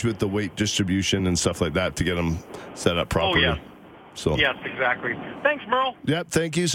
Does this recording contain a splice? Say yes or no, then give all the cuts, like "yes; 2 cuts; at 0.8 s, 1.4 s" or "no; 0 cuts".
no; 0 cuts